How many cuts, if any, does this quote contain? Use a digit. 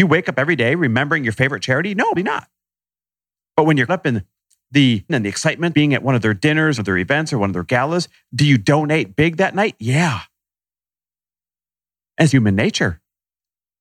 6